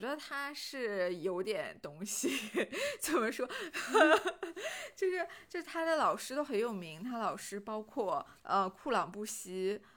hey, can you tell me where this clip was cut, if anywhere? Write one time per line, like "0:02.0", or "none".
0:08.4